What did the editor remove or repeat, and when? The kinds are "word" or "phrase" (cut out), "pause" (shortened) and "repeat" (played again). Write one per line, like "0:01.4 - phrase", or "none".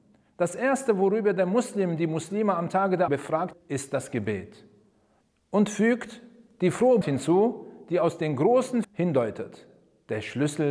0:03.1 - word
0:03.5 - word
0:07.0 - word
0:08.8 - word